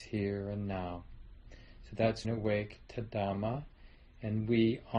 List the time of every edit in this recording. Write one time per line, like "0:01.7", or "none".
0:02.2